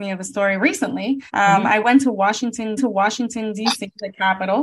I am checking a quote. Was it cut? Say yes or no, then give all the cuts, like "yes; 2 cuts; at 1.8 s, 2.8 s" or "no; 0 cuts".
yes; 2 cuts; at 1.3 s, 2.8 s